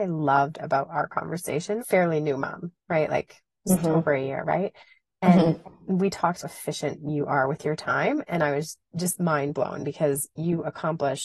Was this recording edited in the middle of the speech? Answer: yes; 2 cuts; at 1.8 s, 6.4 s

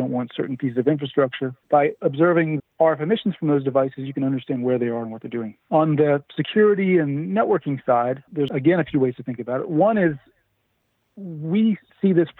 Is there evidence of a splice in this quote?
yes; 4 cuts; at 1.6 s, 2.6 s, 5.6 s, 8.3 s

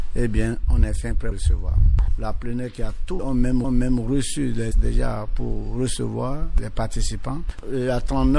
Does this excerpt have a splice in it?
yes; 4 cuts; at 1.3 s, 3.2 s, 3.6 s, 4.7 s

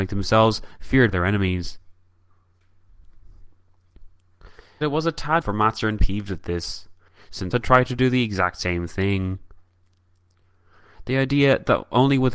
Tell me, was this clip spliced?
yes; 5 cuts; at 1.1 s, 4.8 s, 5.4 s, 6.0 s, 7.5 s

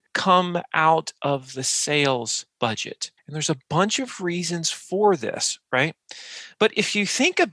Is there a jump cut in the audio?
yes; 1 cut; at 3.2 s

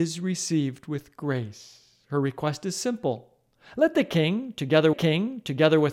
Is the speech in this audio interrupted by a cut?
yes; 1 cut; at 4.9 s

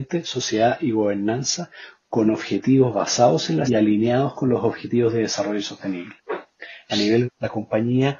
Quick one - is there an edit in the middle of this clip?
yes; 3 cuts; at 3.7 s, 6.2 s, 7.2 s

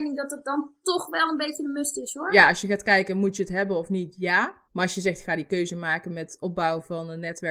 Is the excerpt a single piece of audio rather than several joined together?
no; 1 cut; at 4.7 s

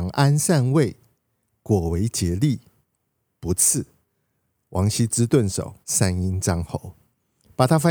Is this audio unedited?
no; 1 cut; at 5.8 s

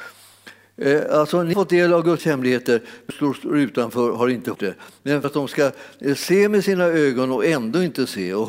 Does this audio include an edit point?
yes; 5 cuts; at 1.5 s, 2.2 s, 3.1 s, 4.5 s, 5.2 s

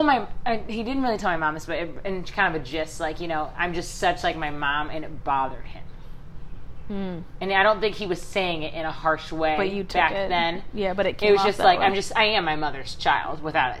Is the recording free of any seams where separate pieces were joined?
yes; 0 cuts

